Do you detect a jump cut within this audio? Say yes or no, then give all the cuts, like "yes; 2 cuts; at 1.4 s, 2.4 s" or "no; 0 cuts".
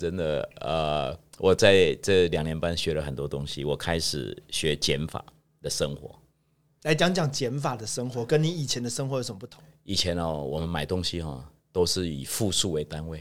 no; 0 cuts